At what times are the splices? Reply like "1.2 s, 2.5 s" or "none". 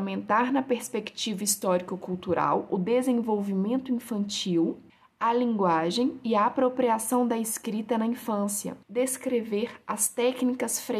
4.9 s, 8.8 s

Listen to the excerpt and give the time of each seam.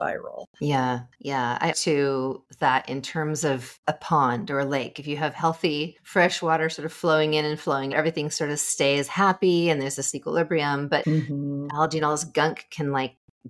1.7 s, 7.9 s, 10.1 s, 11.0 s

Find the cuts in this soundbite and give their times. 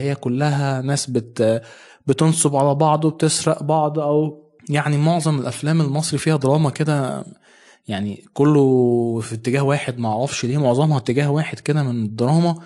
none

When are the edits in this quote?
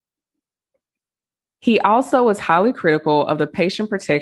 none

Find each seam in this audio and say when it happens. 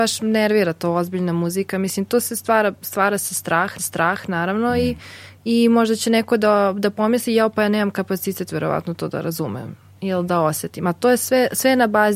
3.8 s

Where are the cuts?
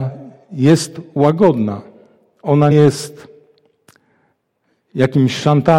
2.7 s

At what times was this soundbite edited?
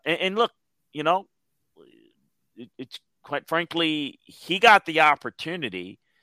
none

